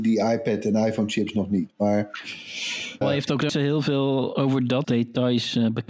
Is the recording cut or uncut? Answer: cut